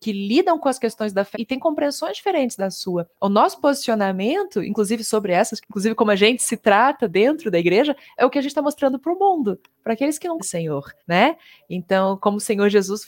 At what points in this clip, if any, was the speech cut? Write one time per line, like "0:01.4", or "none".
0:01.3
0:03.1
0:05.6
0:08.2
0:10.4
0:11.0